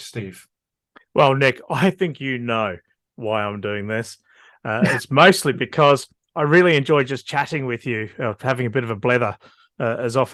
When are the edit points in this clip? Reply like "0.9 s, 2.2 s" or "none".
none